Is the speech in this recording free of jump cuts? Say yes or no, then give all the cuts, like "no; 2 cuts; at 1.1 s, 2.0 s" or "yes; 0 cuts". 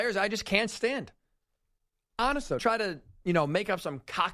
no; 2 cuts; at 2.2 s, 2.6 s